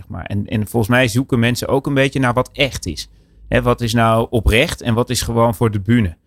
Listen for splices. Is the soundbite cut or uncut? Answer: uncut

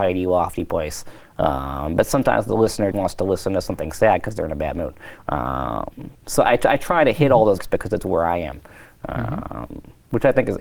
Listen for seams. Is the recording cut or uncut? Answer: cut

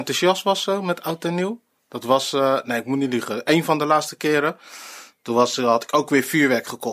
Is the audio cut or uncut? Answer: uncut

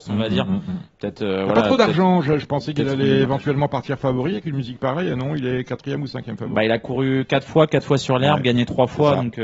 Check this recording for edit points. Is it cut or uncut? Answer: uncut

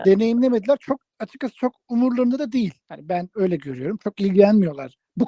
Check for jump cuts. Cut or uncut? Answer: cut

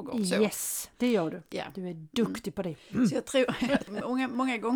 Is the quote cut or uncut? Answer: cut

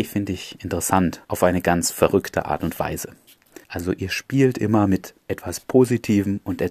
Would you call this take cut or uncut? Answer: cut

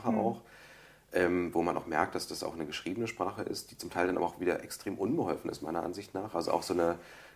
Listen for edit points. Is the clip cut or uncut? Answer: uncut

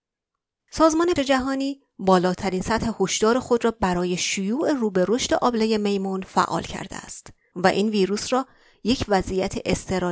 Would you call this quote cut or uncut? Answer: cut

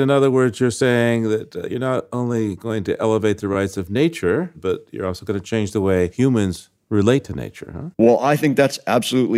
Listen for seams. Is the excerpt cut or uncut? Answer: cut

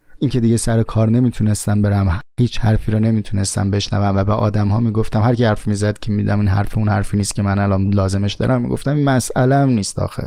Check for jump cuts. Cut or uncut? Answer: uncut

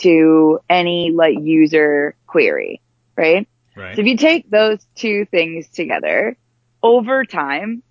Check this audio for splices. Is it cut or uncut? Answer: uncut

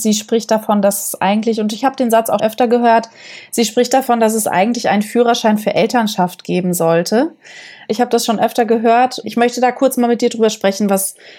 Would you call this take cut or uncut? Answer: cut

